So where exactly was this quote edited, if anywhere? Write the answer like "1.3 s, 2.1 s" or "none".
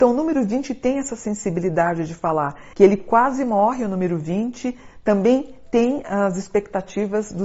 2.7 s